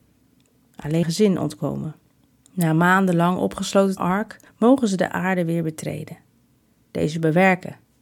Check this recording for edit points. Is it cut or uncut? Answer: cut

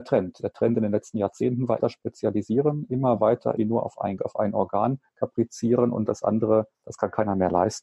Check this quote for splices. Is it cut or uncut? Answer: cut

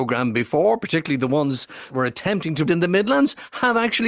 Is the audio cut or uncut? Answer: cut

